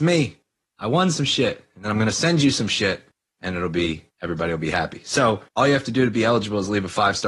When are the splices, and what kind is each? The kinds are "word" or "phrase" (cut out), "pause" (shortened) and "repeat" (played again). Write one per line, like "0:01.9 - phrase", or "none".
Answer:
0:03.1 - pause
0:04.1 - pause
0:05.5 - pause